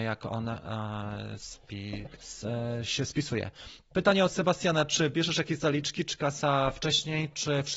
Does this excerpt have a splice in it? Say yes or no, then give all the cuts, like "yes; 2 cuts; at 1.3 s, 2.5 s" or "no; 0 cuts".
yes; 1 cut; at 2.2 s